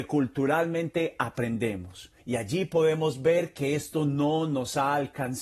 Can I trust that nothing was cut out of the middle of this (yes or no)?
no